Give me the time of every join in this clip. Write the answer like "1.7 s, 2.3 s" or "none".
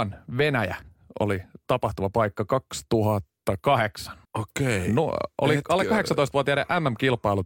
4.2 s

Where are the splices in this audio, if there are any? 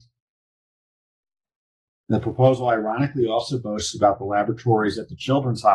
none

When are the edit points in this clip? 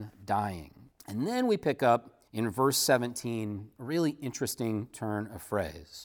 0.9 s, 2.3 s

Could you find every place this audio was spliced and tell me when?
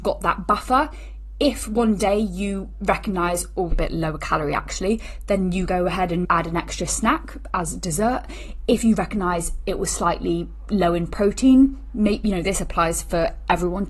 3.7 s, 5.7 s, 6.2 s

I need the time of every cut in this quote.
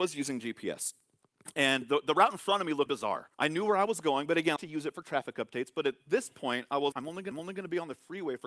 2.9 s, 3.3 s, 4.6 s, 6.9 s, 7.3 s

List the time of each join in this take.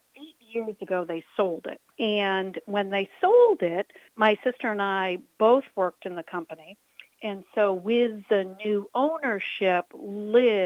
1.9 s, 4.1 s

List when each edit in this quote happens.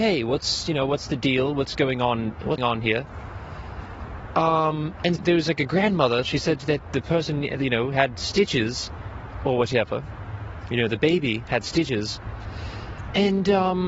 2.6 s, 5.2 s

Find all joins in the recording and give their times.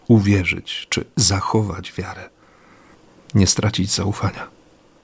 none

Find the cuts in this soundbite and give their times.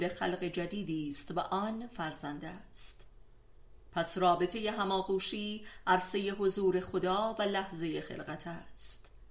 none

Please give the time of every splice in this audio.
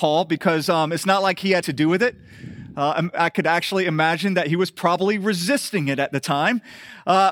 1.6 s

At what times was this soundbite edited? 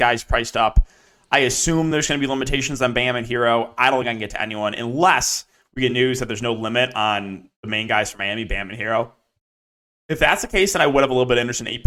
none

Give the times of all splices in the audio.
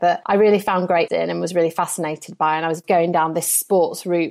1.1 s

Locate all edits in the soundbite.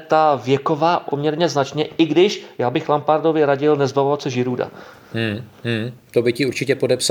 1.1 s

